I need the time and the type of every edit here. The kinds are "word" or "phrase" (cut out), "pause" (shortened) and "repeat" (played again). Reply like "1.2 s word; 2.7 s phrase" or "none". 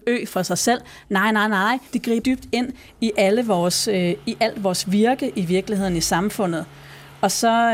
1.9 s pause; 2.2 s word